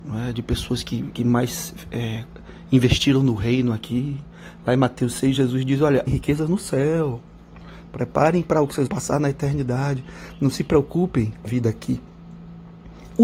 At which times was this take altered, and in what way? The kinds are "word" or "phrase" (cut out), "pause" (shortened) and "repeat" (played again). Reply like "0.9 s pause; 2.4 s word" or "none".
6.1 s word; 8.9 s word; 11.5 s word